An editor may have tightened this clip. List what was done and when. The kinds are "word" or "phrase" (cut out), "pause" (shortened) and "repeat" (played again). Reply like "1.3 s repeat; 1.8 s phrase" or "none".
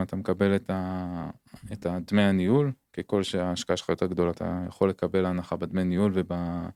4.3 s word